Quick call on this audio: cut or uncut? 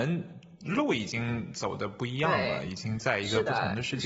uncut